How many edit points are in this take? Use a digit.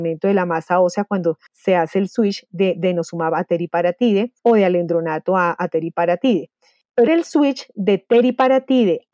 3